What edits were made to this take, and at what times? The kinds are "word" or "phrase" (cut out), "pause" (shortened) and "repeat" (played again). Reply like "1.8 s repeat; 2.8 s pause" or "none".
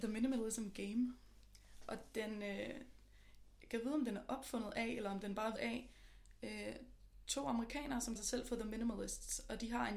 5.6 s word; 8.2 s word